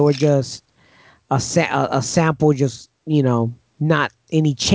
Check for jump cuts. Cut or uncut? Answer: cut